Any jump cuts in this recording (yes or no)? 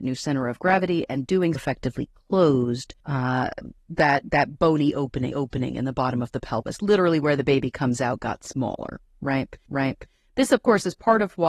yes